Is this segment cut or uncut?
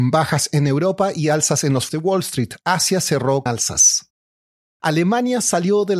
cut